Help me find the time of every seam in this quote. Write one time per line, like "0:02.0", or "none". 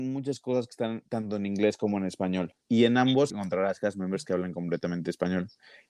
0:02.6
0:03.3